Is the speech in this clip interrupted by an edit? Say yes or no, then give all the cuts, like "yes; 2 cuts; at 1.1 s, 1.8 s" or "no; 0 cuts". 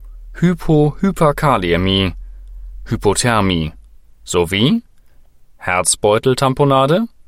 yes; 1 cut; at 4.0 s